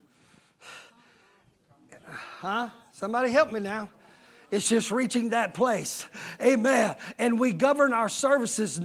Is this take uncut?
yes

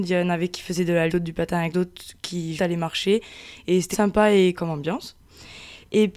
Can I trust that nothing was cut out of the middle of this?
no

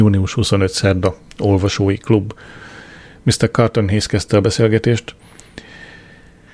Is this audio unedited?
yes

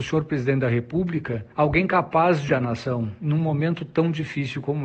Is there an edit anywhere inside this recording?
yes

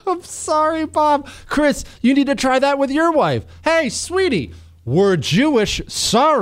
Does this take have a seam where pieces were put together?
no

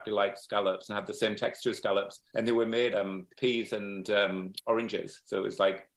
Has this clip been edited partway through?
yes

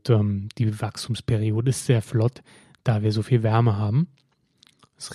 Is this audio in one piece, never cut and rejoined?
yes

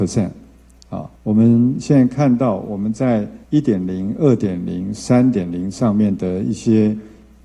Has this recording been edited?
yes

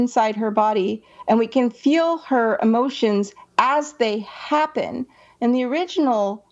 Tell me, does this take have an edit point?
no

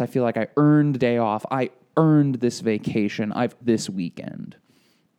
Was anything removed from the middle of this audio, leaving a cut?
yes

